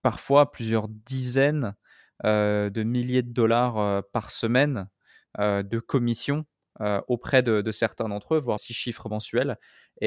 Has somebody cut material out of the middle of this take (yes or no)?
yes